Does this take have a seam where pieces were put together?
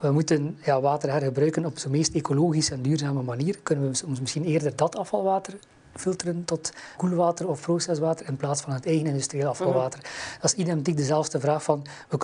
yes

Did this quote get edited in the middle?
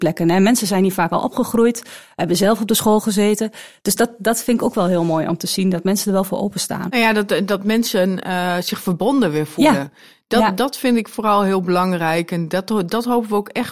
no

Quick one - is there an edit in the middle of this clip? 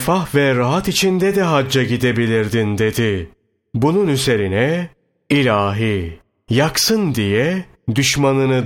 no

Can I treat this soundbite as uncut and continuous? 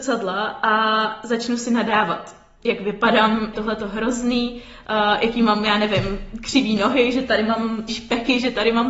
no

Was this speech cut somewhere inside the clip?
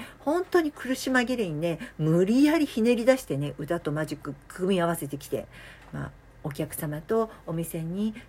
no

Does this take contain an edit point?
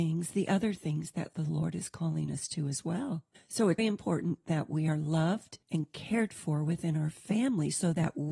yes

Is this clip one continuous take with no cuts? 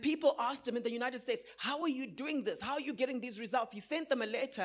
yes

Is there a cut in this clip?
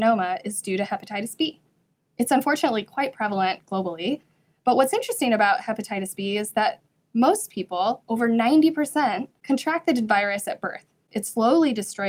no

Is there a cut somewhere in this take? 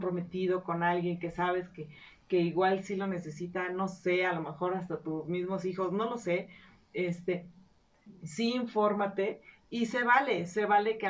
no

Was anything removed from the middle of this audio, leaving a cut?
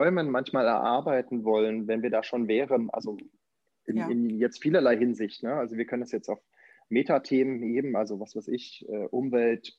no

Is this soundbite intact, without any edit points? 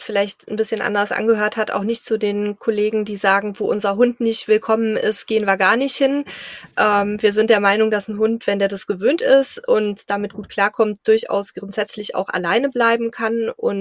yes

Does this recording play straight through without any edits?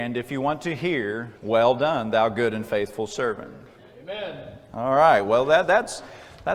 no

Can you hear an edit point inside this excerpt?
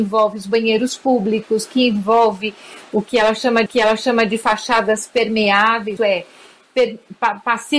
yes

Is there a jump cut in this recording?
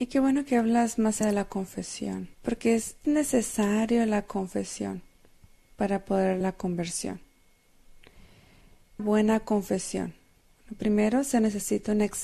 yes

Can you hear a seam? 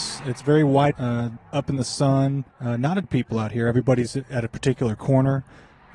yes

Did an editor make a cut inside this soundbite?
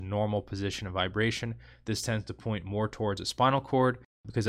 no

